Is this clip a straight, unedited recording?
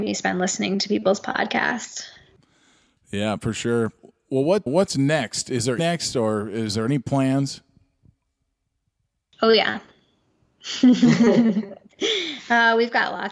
no; 2 cuts; at 4.7 s, 5.8 s

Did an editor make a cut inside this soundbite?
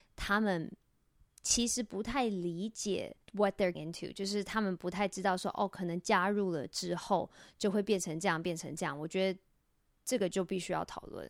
yes; 2 cuts; at 3.2 s, 3.7 s

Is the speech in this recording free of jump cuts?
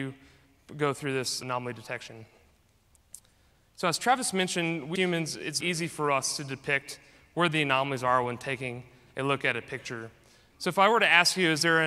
no; 3 cuts; at 1.4 s, 5.0 s, 5.6 s

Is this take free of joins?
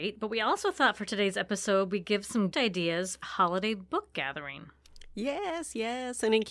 no; 3 cuts; at 2.5 s, 3.2 s, 4.1 s

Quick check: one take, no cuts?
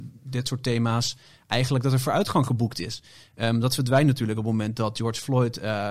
yes; 0 cuts

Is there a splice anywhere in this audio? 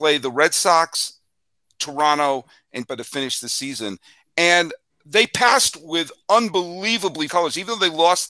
yes; 2 cuts; at 2.9 s, 7.3 s

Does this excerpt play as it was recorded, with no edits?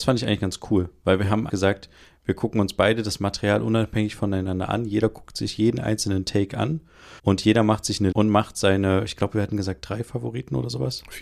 no; 3 cuts; at 1.5 s, 7.2 s, 8.1 s

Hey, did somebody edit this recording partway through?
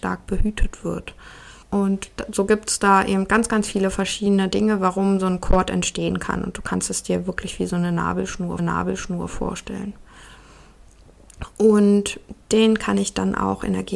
yes; 3 cuts; at 1.6 s, 8.6 s, 12.4 s

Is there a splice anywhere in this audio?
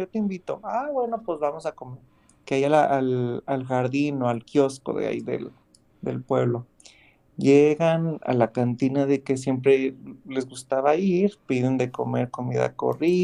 no; 0 cuts

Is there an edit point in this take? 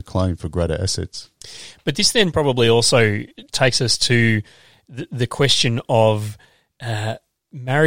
no; 0 cuts

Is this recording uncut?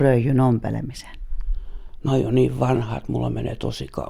no; 1 cut; at 2.1 s

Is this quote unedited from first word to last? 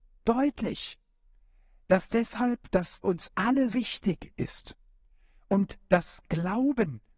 no; 2 cuts; at 3.0 s, 3.7 s

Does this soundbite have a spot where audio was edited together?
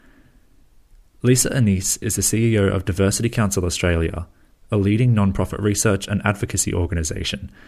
no; 0 cuts

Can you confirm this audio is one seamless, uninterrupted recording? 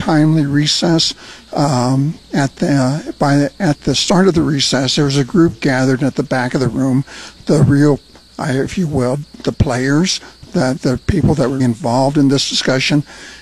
no; 2 cuts; at 10.8 s, 11.6 s

